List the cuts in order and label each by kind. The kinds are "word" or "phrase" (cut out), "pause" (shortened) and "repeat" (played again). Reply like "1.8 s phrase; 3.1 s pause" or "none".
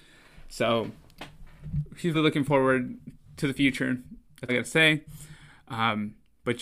2.1 s word; 4.5 s word